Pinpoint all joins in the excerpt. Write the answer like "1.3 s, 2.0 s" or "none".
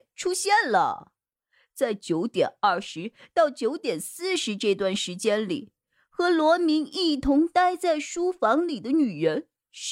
none

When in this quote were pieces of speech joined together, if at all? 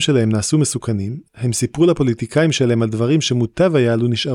none

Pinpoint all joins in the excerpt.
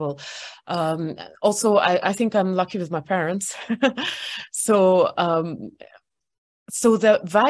none

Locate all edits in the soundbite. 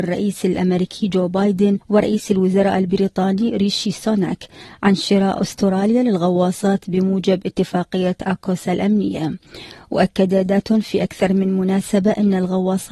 1.8 s

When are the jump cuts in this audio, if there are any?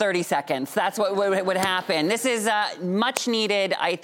none

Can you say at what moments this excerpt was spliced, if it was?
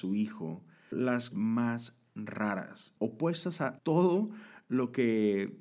0.9 s, 1.3 s, 3.0 s, 3.8 s

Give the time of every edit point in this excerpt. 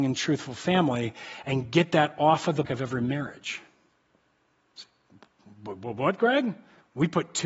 2.7 s

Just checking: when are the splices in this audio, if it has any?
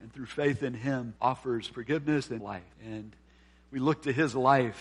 1.2 s, 2.4 s, 2.7 s

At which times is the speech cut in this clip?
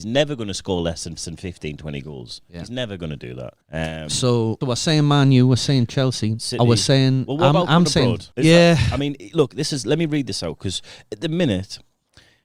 1.2 s, 3.6 s, 4.6 s, 8.3 s

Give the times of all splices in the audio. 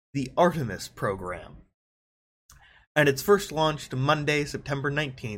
3.9 s

